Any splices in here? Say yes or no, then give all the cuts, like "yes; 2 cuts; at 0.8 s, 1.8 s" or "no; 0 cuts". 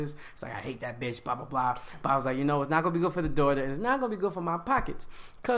no; 0 cuts